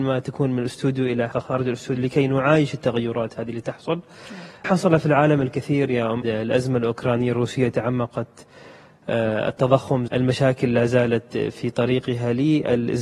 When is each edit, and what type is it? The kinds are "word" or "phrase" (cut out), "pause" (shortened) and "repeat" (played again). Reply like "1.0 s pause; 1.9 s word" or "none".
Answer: 1.3 s word; 4.6 s word; 6.2 s word; 10.1 s word

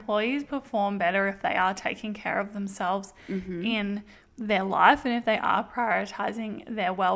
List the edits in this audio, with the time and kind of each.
none

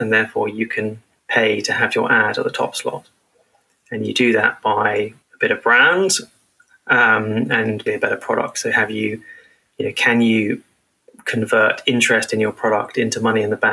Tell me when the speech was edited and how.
1.2 s pause; 5.2 s pause; 7.9 s word

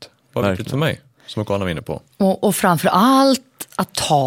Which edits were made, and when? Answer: 2.1 s pause

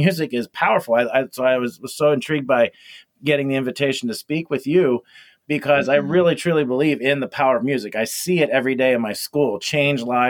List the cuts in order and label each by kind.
none

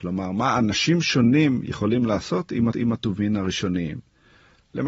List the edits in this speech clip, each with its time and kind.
2.7 s repeat

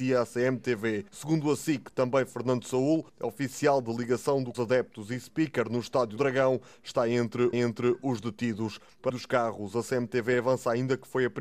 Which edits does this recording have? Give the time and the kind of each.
1.1 s pause; 3.1 s pause; 4.5 s phrase; 6.2 s word; 7.5 s repeat; 9.1 s word

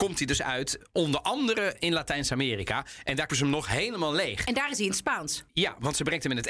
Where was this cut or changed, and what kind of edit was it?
3.3 s word; 5.5 s pause

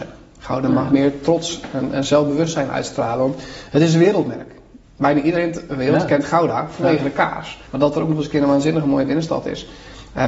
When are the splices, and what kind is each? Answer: 4.8 s pause; 7.7 s pause

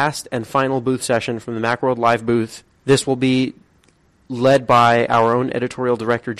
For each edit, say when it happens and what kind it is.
none

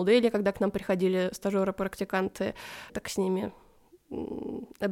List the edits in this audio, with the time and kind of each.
2.9 s word

